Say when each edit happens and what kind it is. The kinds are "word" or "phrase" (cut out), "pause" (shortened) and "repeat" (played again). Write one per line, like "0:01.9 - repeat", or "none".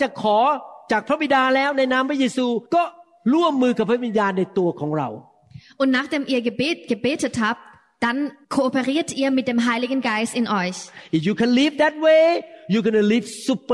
0:02.7 - pause
0:08.4 - pause